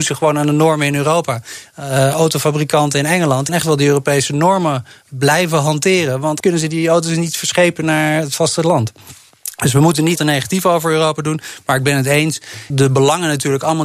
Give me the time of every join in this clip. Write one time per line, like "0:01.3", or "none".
0:03.5
0:06.4
0:10.2
0:12.7